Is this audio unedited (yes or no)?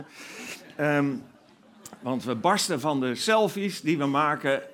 yes